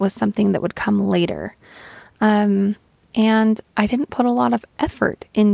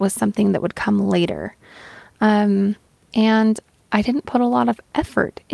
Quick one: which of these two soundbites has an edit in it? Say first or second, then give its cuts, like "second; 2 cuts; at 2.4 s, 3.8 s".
first; 1 cut; at 3.7 s